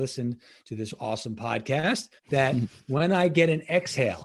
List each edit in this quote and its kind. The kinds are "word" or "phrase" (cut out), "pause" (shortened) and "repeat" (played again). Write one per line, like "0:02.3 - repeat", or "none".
0:02.2 - pause